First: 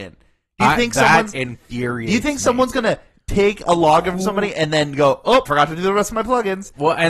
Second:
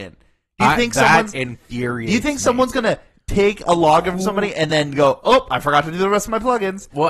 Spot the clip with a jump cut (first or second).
first